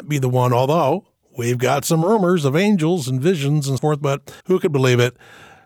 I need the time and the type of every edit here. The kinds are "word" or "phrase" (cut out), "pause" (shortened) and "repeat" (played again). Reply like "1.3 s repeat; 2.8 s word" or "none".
3.8 s word; 4.4 s pause